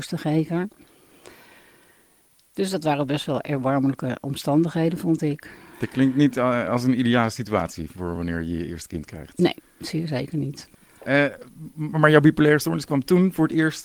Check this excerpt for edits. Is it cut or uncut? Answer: uncut